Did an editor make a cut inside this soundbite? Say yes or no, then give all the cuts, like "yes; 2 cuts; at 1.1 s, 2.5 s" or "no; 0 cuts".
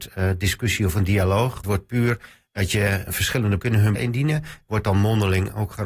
yes; 4 cuts; at 1.6 s, 3.1 s, 3.6 s, 4.0 s